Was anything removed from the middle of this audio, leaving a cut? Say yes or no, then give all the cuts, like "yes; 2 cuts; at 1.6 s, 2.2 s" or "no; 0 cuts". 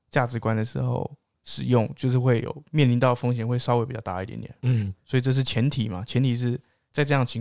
yes; 1 cut; at 5.0 s